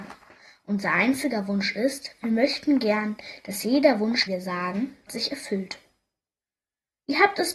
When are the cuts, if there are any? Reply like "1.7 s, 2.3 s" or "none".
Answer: 4.3 s, 5.1 s